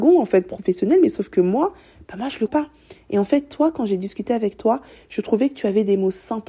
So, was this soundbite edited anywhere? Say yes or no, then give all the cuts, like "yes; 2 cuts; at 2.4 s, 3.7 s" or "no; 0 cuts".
yes; 1 cut; at 2.5 s